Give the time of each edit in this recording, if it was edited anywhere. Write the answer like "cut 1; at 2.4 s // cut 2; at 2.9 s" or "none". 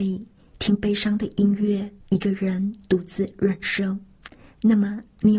cut 1; at 2.0 s